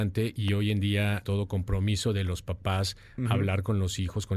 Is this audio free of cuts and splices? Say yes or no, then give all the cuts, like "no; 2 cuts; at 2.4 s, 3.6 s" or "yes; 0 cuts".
no; 1 cut; at 1.2 s